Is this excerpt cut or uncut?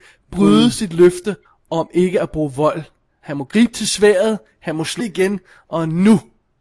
cut